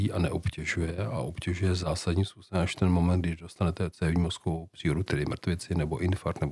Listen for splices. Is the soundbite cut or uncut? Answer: uncut